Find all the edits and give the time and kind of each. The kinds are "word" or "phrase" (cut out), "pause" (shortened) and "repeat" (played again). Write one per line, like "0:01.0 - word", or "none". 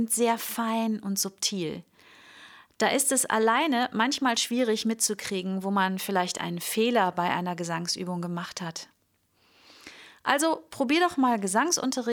none

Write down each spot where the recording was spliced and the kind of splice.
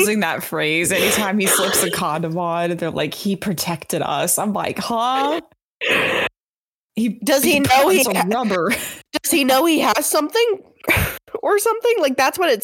none

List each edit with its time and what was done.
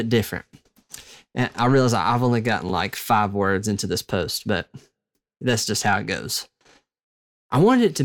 none

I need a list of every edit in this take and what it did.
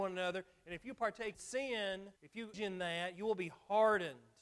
0:01.3 - word
0:02.2 - pause
0:02.5 - word

